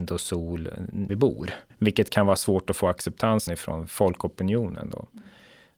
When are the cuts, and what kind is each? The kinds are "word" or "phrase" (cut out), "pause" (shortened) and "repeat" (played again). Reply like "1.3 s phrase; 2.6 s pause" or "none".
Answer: 1.1 s phrase; 1.7 s pause; 3.5 s word